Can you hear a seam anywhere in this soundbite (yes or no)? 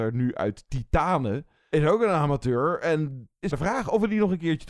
yes